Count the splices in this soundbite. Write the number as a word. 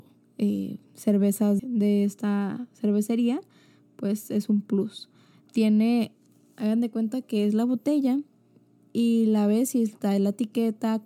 one